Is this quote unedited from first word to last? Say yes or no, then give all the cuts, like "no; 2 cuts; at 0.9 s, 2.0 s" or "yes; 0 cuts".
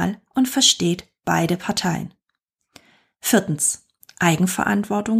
yes; 0 cuts